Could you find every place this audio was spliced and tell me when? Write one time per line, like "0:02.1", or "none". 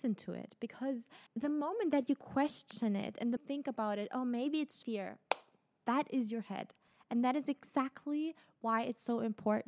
0:01.3
0:03.4
0:04.8